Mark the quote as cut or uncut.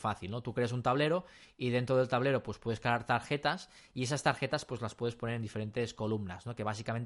uncut